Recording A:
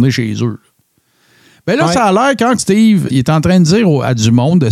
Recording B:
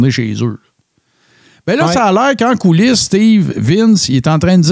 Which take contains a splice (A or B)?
A